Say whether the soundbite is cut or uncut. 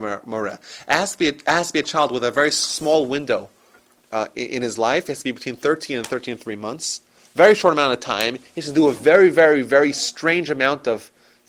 uncut